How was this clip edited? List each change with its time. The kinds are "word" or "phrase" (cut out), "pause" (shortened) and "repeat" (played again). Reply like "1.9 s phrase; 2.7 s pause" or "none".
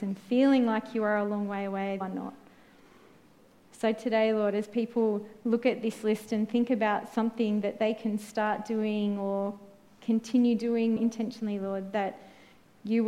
2.0 s phrase; 11.0 s word